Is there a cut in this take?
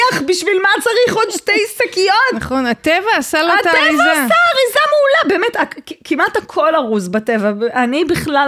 no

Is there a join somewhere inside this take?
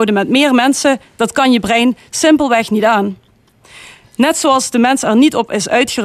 no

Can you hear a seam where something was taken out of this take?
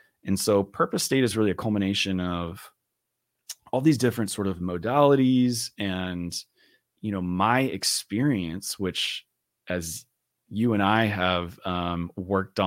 no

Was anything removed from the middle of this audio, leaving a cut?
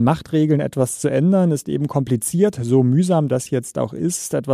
no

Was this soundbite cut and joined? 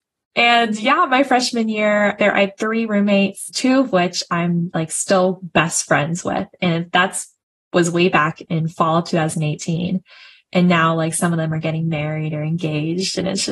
no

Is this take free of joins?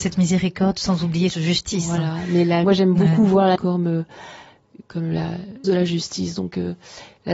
no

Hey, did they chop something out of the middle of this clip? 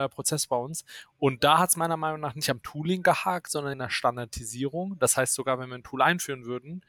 yes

